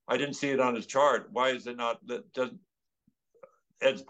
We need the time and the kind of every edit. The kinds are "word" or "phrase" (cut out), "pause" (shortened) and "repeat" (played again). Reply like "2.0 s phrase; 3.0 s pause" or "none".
none

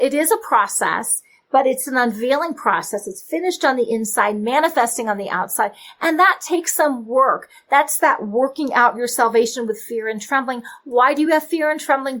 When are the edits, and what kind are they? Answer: none

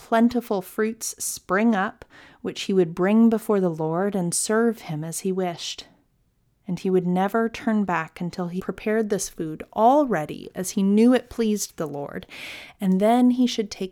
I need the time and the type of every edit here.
8.6 s word

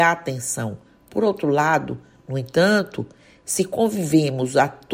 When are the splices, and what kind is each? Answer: none

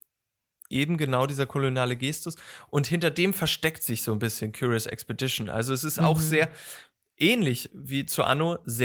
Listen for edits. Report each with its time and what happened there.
none

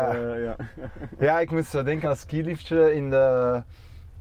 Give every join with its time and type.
2.0 s word

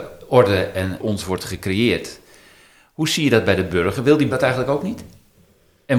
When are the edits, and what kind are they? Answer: 1.0 s word; 4.3 s word

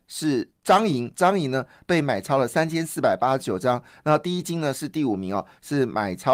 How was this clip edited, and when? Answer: 1.1 s word

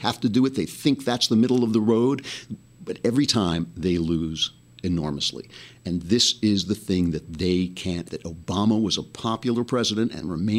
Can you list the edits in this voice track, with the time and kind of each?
8.0 s word

